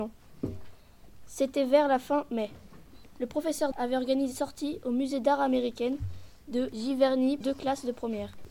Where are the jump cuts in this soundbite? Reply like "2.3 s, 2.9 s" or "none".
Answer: 3.7 s, 4.3 s, 7.4 s